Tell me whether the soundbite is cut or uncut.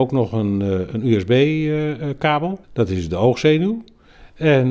cut